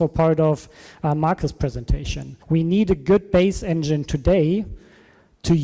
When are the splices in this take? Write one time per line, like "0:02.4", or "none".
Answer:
0:02.4